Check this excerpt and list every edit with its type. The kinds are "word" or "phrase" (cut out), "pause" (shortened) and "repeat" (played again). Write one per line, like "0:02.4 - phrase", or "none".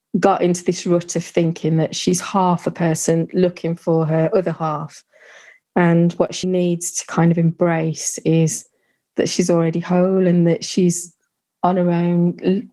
0:06.4 - word